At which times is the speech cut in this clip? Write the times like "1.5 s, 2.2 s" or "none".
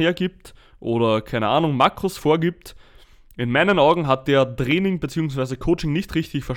none